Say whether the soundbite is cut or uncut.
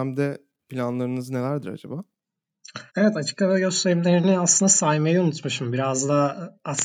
cut